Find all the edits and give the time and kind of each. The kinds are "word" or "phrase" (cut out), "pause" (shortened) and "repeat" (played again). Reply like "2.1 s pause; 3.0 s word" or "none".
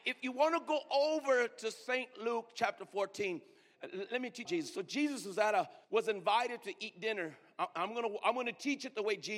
4.1 s word; 4.4 s phrase; 5.8 s pause